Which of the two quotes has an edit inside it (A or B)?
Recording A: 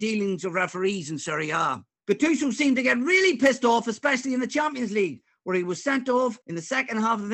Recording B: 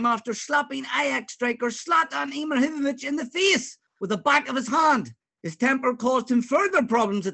A